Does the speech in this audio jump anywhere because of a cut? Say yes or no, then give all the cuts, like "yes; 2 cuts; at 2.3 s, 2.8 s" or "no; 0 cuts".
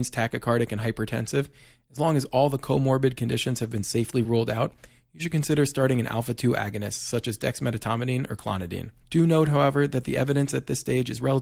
no; 0 cuts